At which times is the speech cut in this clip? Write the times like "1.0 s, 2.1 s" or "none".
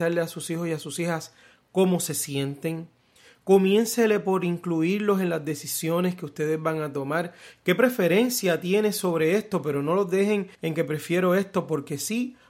10.5 s